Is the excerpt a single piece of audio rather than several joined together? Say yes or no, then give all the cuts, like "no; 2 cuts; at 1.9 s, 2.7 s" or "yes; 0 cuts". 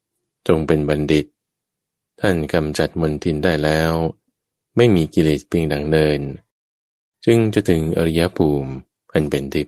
yes; 0 cuts